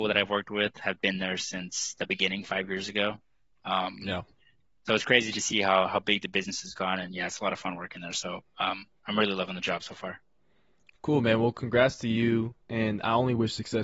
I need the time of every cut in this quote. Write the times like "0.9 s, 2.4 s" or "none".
none